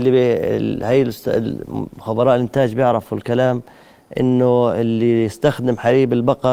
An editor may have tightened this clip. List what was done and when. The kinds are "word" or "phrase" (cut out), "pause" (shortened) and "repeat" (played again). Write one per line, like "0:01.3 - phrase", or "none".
0:01.9 - pause